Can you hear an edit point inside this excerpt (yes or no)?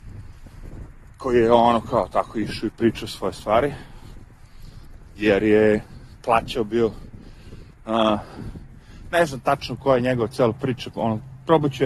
yes